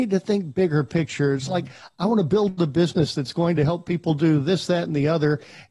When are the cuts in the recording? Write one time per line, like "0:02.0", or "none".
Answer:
none